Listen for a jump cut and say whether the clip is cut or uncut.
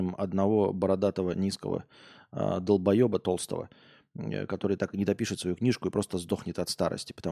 uncut